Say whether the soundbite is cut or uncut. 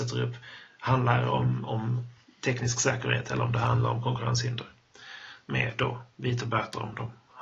uncut